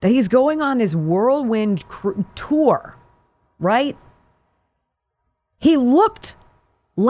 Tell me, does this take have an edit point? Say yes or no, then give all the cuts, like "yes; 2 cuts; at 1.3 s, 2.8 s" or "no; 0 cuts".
no; 0 cuts